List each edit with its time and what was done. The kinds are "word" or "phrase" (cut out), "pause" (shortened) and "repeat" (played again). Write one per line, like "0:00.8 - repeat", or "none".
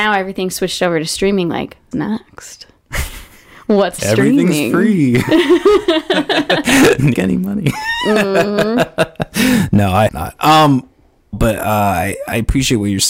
0:01.9 - word
0:04.0 - word
0:07.1 - phrase
0:10.1 - word
0:11.3 - word